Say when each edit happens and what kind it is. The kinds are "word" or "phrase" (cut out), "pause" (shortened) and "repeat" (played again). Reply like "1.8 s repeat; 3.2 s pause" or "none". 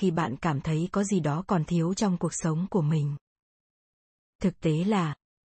none